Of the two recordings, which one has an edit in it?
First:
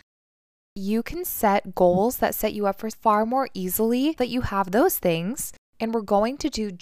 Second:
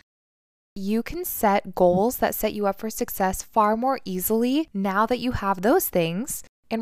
first; 2 cuts; at 2.9 s, 4.2 s

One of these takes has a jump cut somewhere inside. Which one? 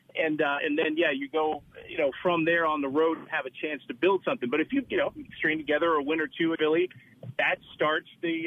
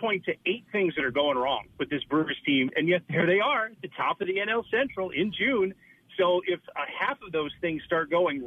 first; 1 cut; at 6.5 s

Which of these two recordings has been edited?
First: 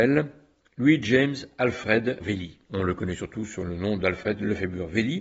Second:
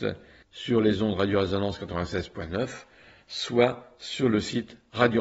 first; 2 cuts; at 2.2 s, 2.6 s

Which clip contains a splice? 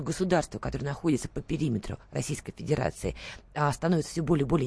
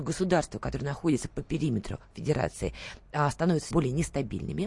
second; 2 cuts; at 2.1 s, 3.7 s

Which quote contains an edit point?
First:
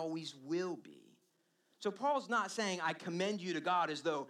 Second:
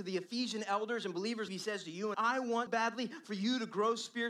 second; 3 cuts; at 1.5 s, 2.1 s, 2.7 s

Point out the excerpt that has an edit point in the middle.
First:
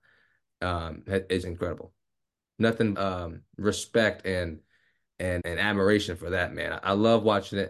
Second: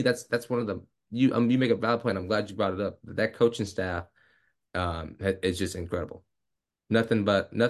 first; 3 cuts; at 1.4 s, 2.9 s, 5.4 s

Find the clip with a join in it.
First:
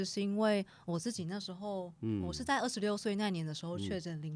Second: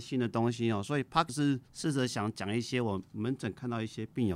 second; 2 cuts; at 1.3 s, 1.7 s

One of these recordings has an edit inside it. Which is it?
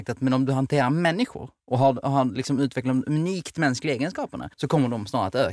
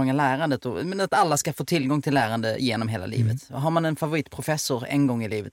first; 2 cuts; at 1.6 s, 4.5 s

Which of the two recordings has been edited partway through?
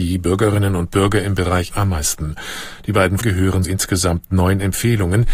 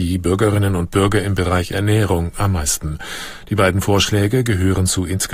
first; 3 cuts; at 1.7 s, 3.2 s, 3.6 s

